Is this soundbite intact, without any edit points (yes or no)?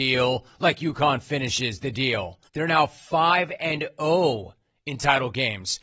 no